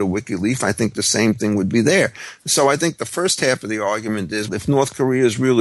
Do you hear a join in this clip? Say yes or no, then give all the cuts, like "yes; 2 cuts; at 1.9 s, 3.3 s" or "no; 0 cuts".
yes; 1 cut; at 4.5 s